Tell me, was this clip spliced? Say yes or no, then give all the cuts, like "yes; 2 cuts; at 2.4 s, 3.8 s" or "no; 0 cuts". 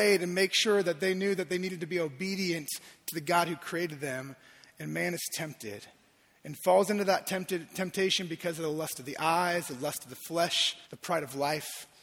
yes; 1 cut; at 10.8 s